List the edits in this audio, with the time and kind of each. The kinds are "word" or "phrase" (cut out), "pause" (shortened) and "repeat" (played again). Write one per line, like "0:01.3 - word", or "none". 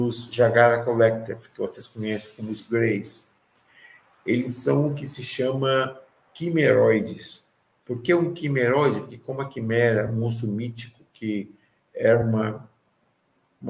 none

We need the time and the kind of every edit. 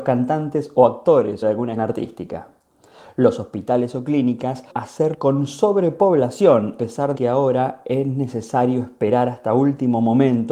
0:01.4 - word
0:01.8 - word
0:04.7 - word
0:05.1 - word
0:06.8 - word
0:07.1 - word

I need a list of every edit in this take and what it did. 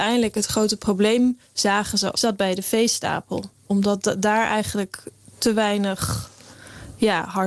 0:02.1 - phrase

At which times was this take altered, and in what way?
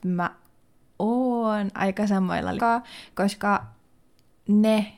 0:02.6 - phrase

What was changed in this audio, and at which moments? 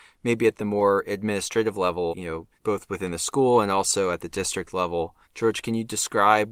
0:02.1 - word
0:02.6 - pause
0:05.2 - pause

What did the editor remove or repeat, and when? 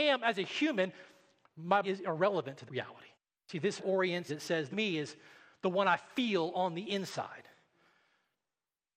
0:01.8 - word
0:02.7 - word
0:03.1 - pause
0:03.8 - word
0:04.3 - phrase
0:04.7 - phrase

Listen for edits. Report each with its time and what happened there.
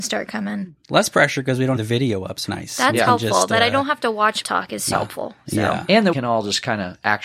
0:01.8 - word
0:02.5 - word
0:04.4 - word
0:04.9 - word
0:06.1 - word

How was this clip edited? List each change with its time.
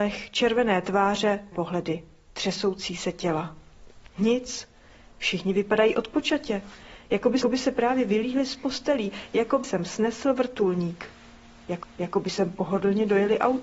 0:01.5 - word
0:07.4 - repeat
0:09.6 - word
0:11.8 - repeat

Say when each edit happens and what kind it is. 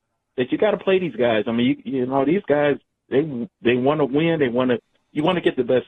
none

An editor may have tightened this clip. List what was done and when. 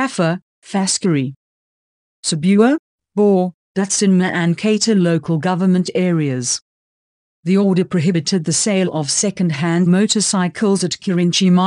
none

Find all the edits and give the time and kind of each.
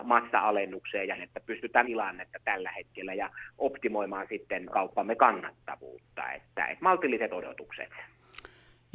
0:01.2 - word
0:01.8 - phrase
0:04.7 - word

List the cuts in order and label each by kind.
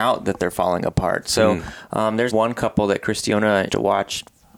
0:02.3 - word
0:03.7 - word

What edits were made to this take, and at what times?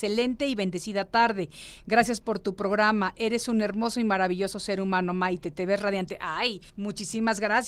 0:06.7 - pause

